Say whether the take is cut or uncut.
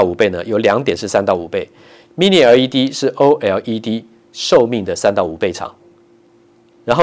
uncut